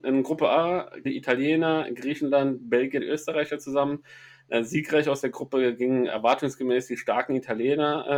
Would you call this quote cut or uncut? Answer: cut